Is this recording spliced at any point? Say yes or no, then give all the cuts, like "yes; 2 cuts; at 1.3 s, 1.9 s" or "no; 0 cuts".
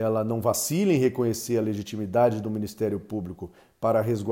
no; 0 cuts